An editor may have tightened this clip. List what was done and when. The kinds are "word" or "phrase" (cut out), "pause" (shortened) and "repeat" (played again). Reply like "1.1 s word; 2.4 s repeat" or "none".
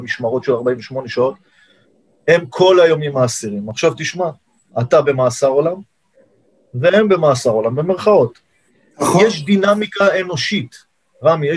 none